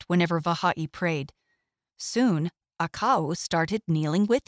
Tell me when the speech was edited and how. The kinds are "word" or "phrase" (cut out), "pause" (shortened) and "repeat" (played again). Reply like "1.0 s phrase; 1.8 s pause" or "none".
none